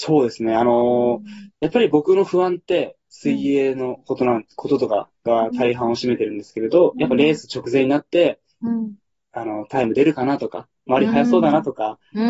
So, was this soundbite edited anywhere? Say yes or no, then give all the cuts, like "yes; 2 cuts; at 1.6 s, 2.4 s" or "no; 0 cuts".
no; 0 cuts